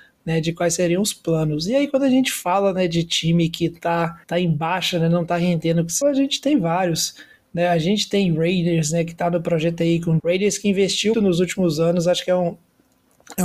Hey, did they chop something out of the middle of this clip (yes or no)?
yes